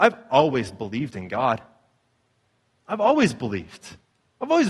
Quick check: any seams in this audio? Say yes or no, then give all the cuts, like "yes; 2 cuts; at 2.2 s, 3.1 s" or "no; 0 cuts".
no; 0 cuts